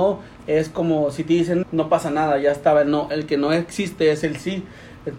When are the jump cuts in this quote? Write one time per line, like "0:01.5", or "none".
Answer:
0:01.6